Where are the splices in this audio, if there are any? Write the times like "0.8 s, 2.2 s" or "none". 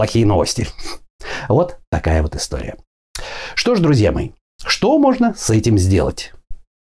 none